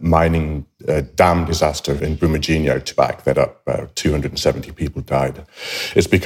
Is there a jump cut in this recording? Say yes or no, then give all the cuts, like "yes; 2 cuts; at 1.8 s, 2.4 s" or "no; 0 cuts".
yes; 3 cuts; at 2.0 s, 2.9 s, 3.3 s